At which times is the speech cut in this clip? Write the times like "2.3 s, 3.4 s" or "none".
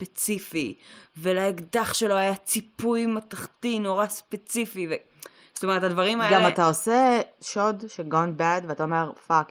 none